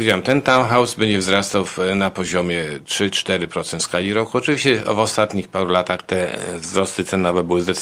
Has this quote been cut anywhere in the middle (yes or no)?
no